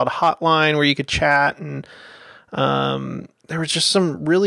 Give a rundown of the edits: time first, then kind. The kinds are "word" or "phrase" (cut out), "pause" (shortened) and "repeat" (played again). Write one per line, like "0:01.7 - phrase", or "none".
0:03.4 - pause